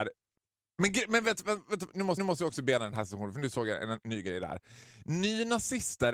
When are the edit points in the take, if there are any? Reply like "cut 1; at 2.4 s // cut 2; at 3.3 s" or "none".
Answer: cut 1; at 2.2 s